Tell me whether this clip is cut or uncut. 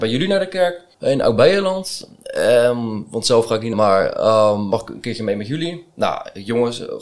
cut